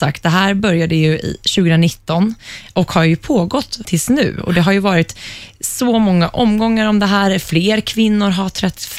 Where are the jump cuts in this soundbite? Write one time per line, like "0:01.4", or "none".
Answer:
0:03.8